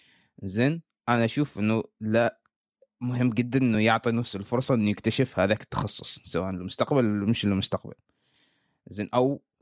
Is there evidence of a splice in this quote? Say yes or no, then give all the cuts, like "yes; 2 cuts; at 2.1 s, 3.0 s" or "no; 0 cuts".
no; 0 cuts